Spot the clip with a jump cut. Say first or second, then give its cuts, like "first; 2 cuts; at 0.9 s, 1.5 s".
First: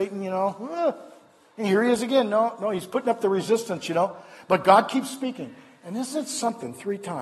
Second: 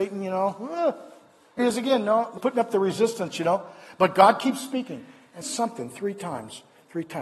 second; 3 cuts; at 1.6 s, 2.4 s, 5.4 s